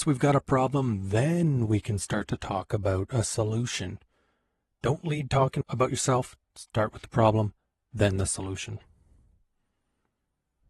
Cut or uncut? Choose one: uncut